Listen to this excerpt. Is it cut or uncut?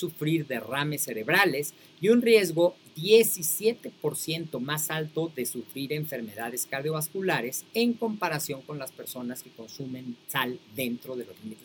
uncut